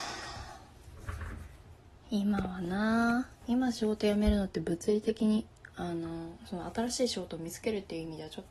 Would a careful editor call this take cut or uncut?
uncut